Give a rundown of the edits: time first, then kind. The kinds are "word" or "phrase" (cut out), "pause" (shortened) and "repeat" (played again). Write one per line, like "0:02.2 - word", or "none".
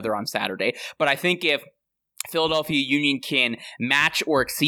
none

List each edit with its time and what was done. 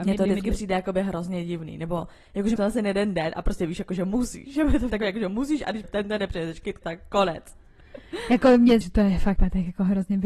0:02.6 - word
0:04.9 - word
0:05.8 - word
0:06.8 - word
0:08.8 - word
0:09.4 - word

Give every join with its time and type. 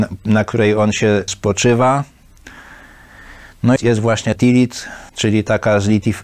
0:01.3 - word
0:03.8 - phrase
0:04.4 - word
0:05.1 - pause

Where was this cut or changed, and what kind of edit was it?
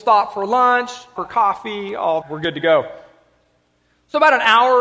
0:01.2 - word
0:02.2 - word

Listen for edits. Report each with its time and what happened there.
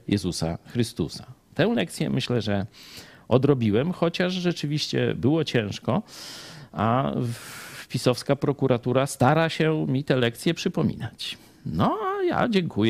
none

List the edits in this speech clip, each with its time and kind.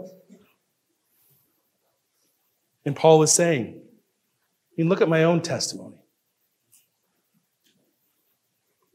none

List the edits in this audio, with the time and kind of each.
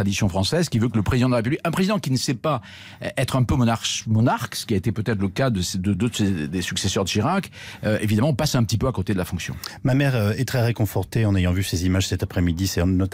none

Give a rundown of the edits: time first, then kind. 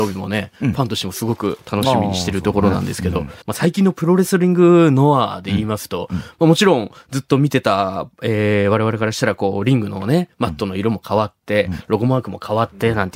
0:03.4 - pause

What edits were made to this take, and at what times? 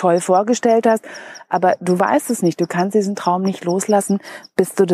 none

